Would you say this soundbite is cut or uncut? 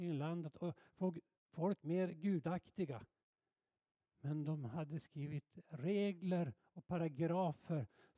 uncut